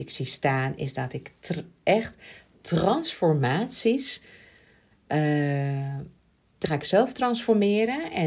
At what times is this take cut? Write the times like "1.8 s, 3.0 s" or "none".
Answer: 6.6 s